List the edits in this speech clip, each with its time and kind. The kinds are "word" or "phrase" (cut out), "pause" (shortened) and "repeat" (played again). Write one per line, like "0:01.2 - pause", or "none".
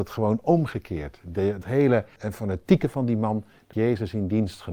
0:01.6 - word
0:02.2 - word
0:03.7 - word